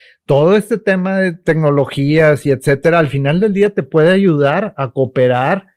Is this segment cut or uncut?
uncut